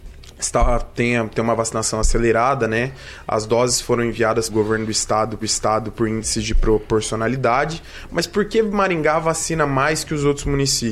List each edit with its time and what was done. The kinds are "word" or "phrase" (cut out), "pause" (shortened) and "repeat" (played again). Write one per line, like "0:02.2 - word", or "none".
0:04.5 - word
0:05.4 - repeat